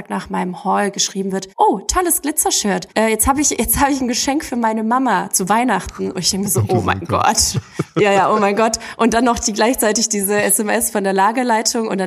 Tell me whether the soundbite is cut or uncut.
cut